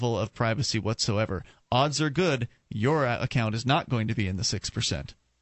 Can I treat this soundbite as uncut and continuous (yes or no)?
yes